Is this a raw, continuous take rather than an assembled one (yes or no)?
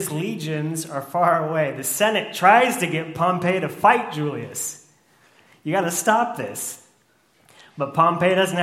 yes